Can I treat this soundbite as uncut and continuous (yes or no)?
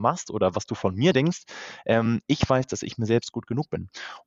yes